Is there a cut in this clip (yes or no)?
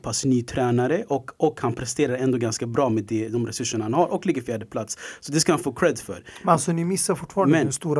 no